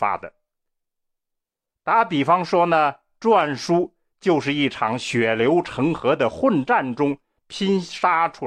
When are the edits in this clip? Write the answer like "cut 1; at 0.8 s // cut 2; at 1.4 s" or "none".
none